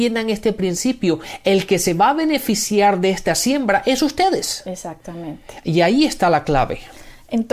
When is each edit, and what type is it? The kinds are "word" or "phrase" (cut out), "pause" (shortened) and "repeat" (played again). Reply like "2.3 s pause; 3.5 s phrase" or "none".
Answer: none